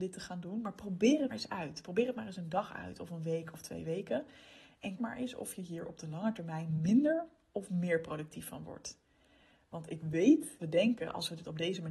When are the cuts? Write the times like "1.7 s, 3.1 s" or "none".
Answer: 1.3 s, 5.0 s, 10.6 s